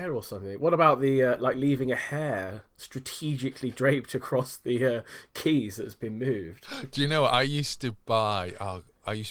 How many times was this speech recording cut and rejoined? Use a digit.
0